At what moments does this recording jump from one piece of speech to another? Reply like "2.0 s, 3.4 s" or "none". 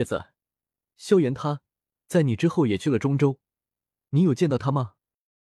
none